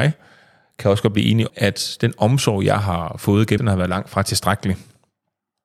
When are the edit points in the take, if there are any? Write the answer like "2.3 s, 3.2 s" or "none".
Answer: 1.5 s, 3.6 s